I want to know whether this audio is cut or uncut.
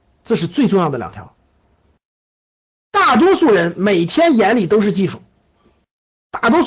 uncut